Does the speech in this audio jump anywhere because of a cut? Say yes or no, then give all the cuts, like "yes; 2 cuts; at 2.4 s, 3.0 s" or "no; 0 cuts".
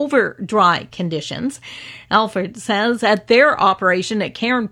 no; 0 cuts